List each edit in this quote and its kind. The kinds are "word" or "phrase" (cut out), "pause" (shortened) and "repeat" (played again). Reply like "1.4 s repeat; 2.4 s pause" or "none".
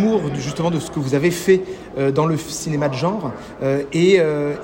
none